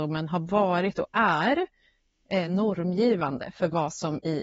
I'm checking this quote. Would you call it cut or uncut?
uncut